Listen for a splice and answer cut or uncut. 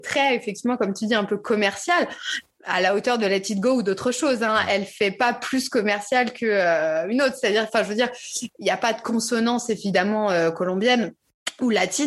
uncut